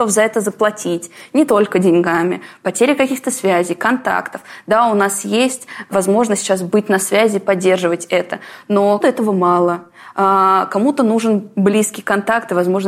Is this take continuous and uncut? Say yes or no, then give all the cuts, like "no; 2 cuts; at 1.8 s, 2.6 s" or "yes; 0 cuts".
no; 1 cut; at 9.0 s